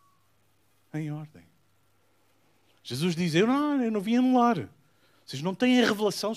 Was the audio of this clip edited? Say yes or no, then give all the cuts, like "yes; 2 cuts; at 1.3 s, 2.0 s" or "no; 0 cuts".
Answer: no; 0 cuts